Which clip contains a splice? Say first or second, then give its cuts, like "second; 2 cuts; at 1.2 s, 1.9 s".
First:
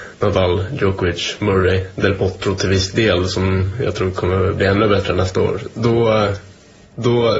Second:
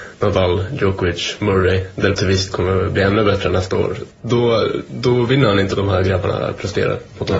second; 4 cuts; at 2.1 s, 2.5 s, 4.1 s, 5.8 s